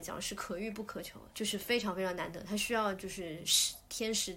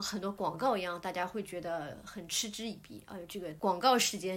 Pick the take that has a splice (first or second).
first